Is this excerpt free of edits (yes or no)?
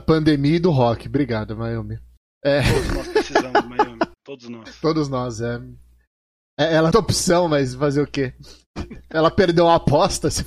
no